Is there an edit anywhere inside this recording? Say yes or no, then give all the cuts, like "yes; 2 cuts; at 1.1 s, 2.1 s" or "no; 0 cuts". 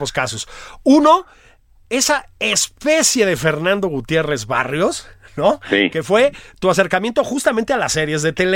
no; 0 cuts